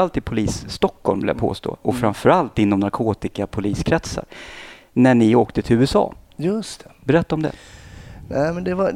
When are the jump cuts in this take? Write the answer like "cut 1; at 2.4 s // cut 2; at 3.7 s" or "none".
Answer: none